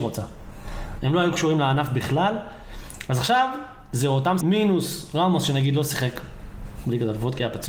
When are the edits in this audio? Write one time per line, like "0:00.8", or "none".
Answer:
0:04.4